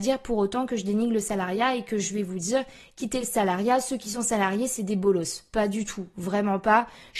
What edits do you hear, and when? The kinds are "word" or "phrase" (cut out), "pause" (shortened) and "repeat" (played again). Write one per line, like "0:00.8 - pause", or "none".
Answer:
none